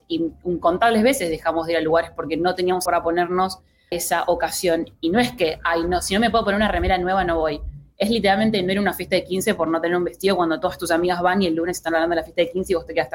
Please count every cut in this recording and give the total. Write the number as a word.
two